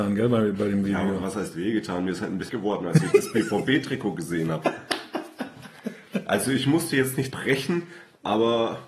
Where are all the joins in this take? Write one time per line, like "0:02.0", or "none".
0:02.5
0:07.3